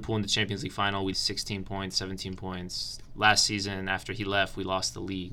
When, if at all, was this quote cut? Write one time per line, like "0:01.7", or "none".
0:01.1